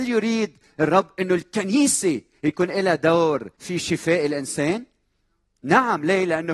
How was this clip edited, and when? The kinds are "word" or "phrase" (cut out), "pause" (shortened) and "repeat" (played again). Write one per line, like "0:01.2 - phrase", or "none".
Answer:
0:03.5 - pause

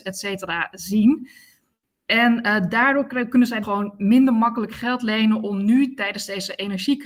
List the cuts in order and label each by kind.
0:03.6 - word

